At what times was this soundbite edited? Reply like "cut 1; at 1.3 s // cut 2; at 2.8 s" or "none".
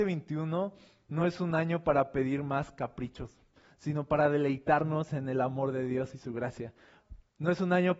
none